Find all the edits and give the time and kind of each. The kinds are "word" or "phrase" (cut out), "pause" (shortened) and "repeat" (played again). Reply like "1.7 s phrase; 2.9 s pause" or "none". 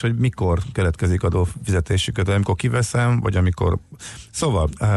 none

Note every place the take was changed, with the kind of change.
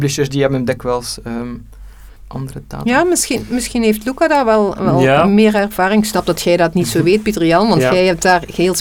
2.2 s pause

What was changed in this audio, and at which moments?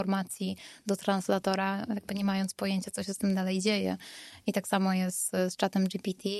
none

